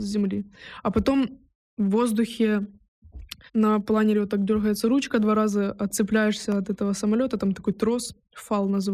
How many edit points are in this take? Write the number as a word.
one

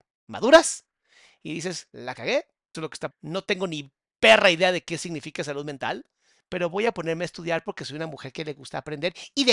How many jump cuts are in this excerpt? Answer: two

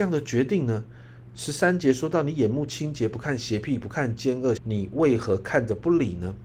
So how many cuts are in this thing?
one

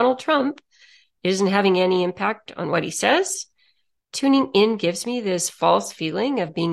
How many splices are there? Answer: zero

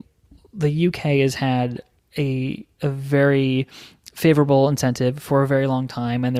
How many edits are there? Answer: one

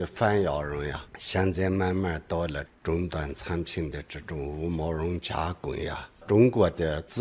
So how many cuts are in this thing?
two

